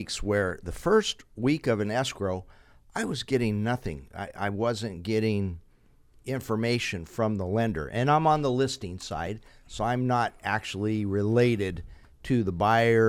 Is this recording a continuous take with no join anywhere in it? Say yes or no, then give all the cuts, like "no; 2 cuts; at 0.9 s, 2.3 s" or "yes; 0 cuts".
yes; 0 cuts